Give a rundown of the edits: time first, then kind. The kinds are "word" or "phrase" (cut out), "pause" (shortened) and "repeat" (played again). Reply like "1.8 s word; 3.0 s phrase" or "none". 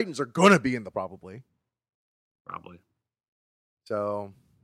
0.9 s word